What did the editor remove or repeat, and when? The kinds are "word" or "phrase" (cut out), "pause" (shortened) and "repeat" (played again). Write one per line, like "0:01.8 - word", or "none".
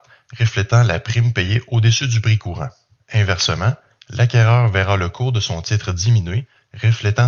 0:03.0 - pause